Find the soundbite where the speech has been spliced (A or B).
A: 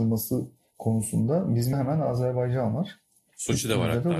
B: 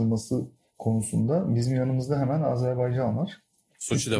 A